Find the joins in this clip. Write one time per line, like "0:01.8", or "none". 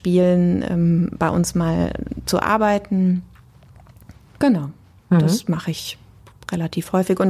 none